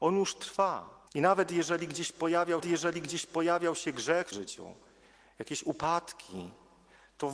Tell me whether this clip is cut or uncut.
cut